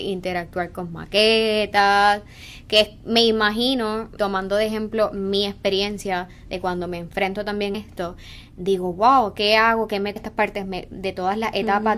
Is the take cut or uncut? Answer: cut